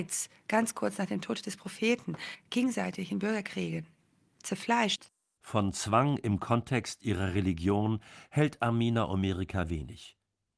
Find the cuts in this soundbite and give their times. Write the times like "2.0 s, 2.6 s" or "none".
none